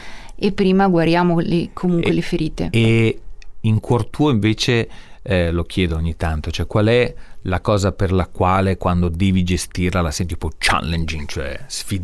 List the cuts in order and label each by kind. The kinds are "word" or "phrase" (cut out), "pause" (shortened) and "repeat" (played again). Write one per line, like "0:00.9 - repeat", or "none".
none